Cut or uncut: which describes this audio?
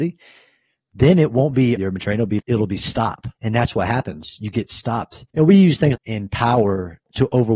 cut